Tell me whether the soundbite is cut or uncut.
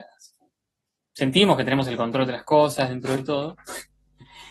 uncut